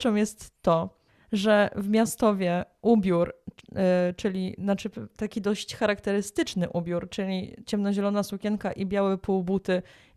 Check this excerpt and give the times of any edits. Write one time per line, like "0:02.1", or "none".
0:01.1